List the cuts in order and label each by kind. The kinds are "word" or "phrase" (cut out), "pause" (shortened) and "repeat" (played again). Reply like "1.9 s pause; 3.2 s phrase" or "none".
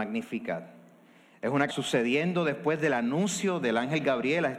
1.7 s phrase